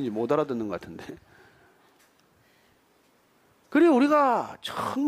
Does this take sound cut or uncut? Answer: uncut